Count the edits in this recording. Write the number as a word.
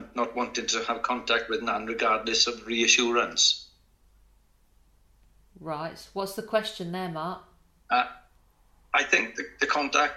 zero